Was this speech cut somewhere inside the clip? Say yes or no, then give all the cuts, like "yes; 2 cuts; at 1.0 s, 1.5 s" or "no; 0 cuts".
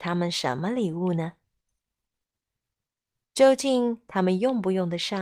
no; 0 cuts